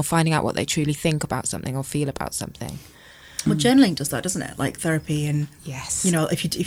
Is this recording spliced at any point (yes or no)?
no